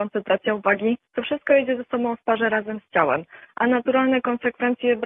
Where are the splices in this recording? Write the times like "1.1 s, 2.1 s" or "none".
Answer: none